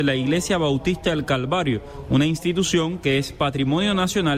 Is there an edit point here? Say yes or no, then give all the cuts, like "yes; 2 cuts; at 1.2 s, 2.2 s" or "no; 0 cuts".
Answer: no; 0 cuts